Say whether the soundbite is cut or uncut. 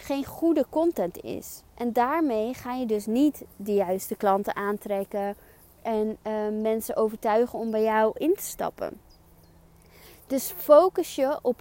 uncut